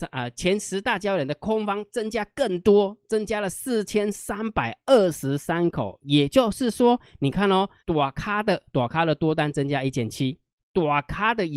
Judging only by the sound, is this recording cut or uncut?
cut